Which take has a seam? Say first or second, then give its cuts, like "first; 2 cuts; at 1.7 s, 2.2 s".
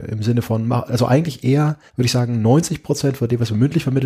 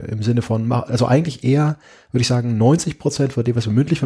first; 1 cut; at 1.9 s